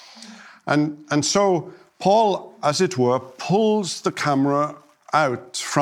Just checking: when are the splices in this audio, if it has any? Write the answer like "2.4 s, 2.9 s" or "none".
none